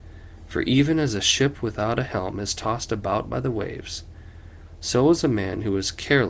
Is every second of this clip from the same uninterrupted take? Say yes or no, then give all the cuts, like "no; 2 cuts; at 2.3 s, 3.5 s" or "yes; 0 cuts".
yes; 0 cuts